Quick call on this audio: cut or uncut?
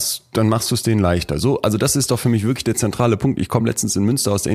uncut